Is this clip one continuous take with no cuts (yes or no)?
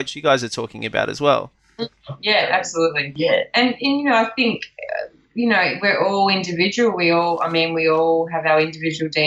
yes